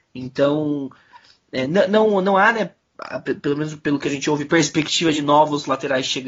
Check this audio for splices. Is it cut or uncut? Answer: uncut